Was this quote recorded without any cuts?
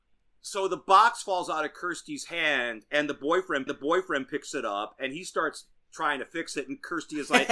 no; 1 cut; at 3.7 s

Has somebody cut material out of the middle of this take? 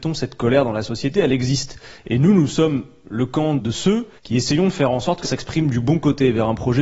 yes; 3 cuts; at 3.6 s, 4.2 s, 5.2 s

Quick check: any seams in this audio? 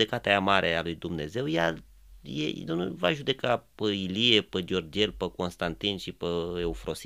yes; 1 cut; at 2.7 s

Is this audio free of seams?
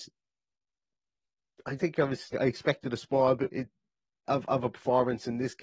no; 4 cuts; at 1.8 s, 2.3 s, 3.5 s, 4.3 s

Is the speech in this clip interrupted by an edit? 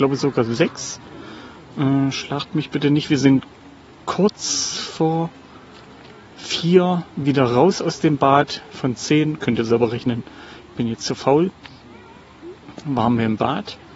no; 0 cuts

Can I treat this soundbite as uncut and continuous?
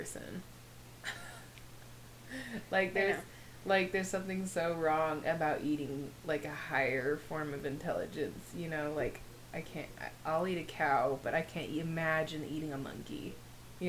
yes; 0 cuts

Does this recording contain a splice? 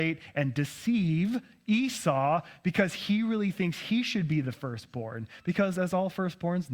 no; 0 cuts

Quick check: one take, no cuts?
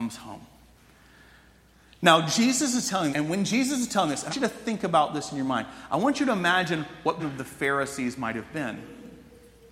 no; 3 cuts; at 3.1 s, 4.3 s, 7.2 s

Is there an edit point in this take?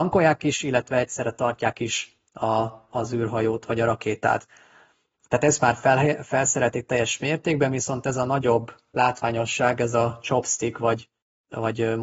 no; 0 cuts

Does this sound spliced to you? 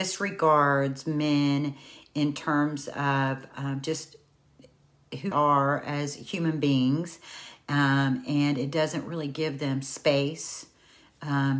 yes; 1 cut; at 5.3 s

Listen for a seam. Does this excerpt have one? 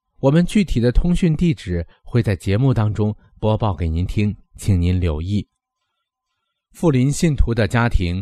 no; 0 cuts

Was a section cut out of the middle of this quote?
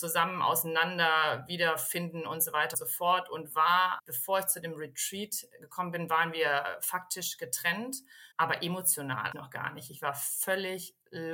yes; 4 cuts; at 2.7 s, 4.0 s, 8.3 s, 9.3 s

